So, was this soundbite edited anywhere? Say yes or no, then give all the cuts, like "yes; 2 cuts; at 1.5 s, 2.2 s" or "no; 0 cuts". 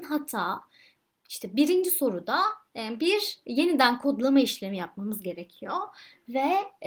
no; 0 cuts